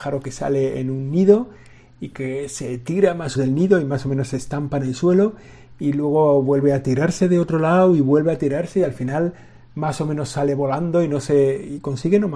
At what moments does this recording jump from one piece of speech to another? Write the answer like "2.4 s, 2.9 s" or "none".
3.4 s